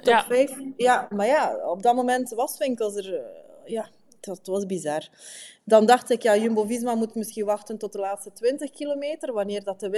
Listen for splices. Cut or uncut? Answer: uncut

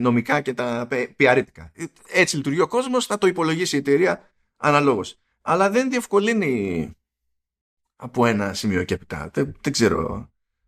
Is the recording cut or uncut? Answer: uncut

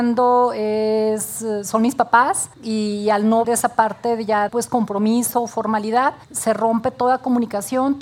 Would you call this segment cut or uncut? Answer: cut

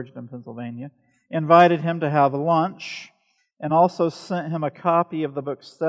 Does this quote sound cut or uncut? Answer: uncut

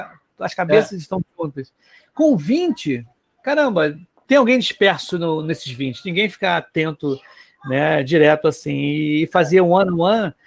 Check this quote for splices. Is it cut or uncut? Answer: uncut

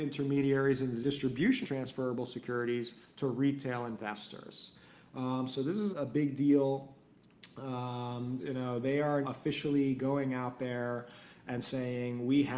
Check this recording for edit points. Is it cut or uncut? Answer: cut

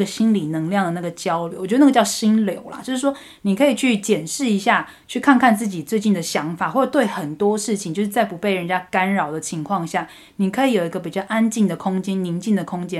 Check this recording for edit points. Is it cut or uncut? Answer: uncut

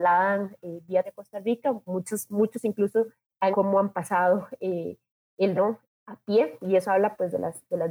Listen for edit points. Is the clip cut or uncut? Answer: cut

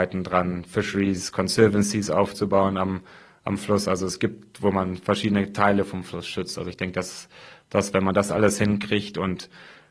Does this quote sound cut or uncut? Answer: uncut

